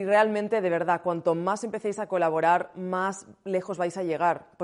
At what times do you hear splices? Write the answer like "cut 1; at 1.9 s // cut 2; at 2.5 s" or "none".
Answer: none